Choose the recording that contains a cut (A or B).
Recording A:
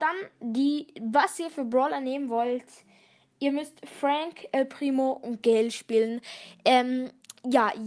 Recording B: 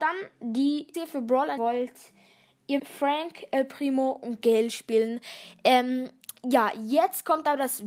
B